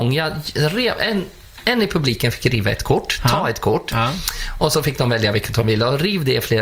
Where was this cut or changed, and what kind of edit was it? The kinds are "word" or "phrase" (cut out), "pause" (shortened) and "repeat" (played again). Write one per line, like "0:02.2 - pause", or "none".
none